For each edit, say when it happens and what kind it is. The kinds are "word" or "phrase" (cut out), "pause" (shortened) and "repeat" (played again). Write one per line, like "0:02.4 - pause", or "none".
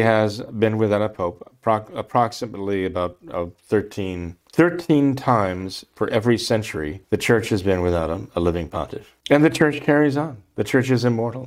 0:04.4 - pause
0:07.0 - pause
0:09.2 - pause

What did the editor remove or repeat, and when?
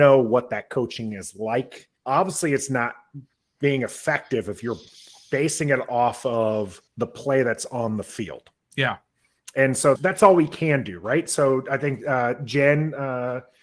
0:02.0 - pause
0:06.9 - pause
0:10.0 - word

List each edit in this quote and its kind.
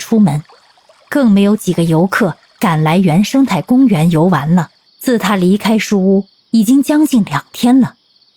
0:04.9 - pause

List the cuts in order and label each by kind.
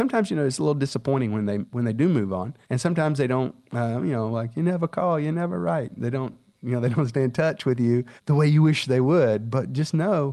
0:02.6 - pause
0:08.2 - pause

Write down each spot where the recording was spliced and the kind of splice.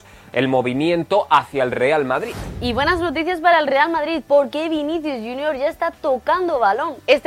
none

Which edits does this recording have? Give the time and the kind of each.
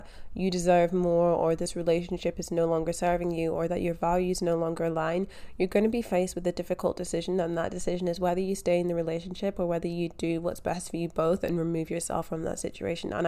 none

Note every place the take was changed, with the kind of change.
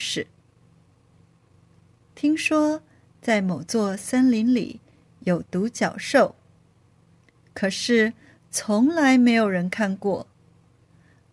none

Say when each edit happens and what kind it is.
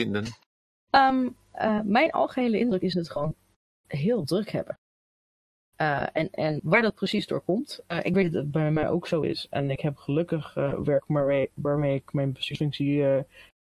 0:02.9 - phrase

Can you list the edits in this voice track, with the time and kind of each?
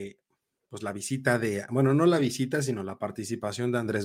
none

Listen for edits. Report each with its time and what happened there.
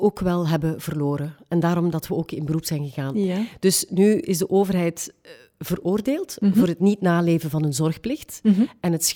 none

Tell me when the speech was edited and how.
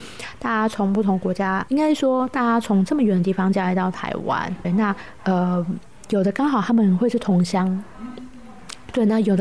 0:01.7 - word
0:04.6 - word

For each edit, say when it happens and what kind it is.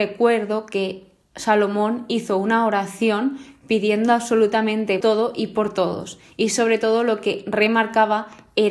0:05.0 - word

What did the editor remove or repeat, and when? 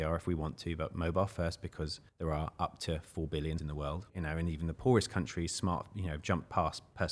0:02.1 - pause
0:03.6 - word
0:04.1 - pause

